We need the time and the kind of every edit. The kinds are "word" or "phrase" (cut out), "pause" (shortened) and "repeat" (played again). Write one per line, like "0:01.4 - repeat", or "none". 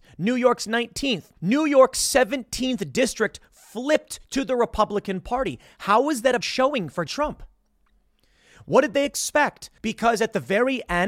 0:01.4 - pause
0:06.4 - word
0:07.1 - word
0:09.8 - pause